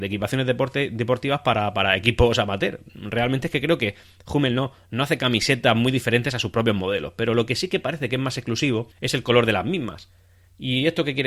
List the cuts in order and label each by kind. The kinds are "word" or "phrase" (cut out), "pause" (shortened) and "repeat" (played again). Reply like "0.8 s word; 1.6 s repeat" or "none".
8.9 s pause